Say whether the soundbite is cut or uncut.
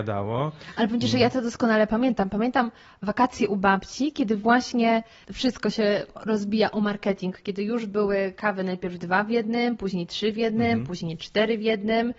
uncut